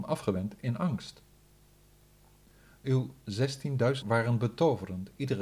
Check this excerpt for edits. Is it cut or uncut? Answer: cut